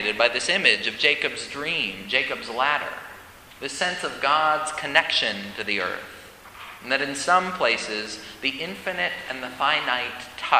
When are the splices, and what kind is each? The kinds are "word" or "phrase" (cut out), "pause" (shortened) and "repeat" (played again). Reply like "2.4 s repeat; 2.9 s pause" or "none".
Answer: 3.6 s pause

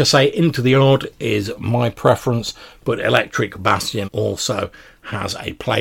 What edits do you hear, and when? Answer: 4.0 s word

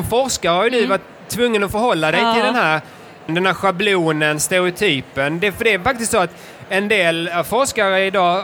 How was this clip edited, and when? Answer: 3.3 s word

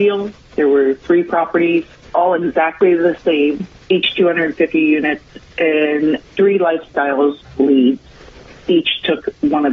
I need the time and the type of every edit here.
3.8 s pause

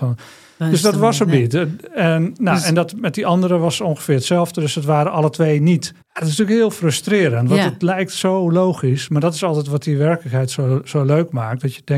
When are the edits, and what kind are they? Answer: 6.0 s pause

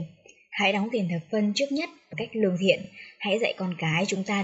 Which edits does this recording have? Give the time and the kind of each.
2.1 s word

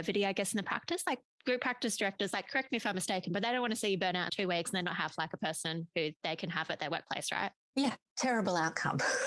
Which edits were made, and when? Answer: 4.3 s word

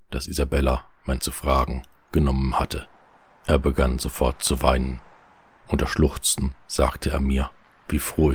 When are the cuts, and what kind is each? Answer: 1.2 s phrase

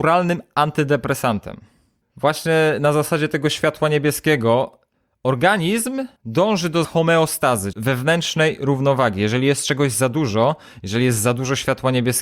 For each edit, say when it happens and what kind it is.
6.2 s pause; 6.8 s word; 7.7 s word

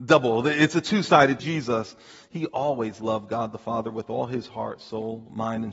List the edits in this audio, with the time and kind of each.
1.4 s phrase

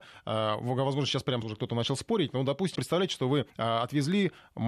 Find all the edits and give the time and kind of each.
1.4 s word; 2.7 s word; 3.5 s pause

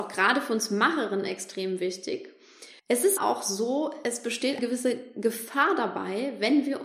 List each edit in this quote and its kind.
2.8 s pause; 3.2 s word; 4.6 s word

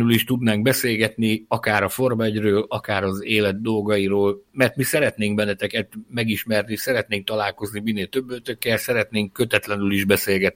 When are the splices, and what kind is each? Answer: none

